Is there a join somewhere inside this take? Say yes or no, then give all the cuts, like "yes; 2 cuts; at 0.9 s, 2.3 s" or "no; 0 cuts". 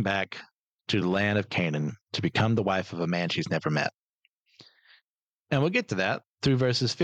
no; 0 cuts